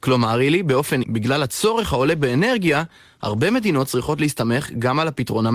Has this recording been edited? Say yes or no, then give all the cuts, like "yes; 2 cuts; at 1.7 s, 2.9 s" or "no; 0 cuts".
yes; 1 cut; at 1.0 s